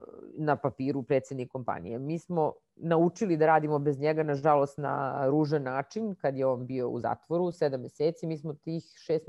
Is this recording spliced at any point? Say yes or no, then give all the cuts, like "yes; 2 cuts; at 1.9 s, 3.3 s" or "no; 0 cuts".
no; 0 cuts